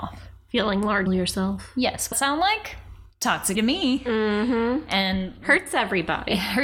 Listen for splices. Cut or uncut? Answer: cut